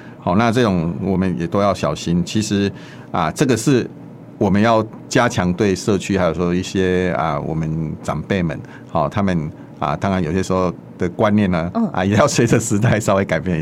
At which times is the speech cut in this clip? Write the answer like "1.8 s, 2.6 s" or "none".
none